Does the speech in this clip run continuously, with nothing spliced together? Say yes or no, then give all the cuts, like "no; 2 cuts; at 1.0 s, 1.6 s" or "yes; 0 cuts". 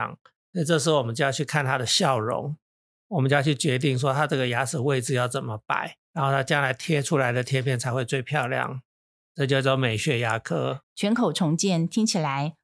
no; 1 cut; at 6.0 s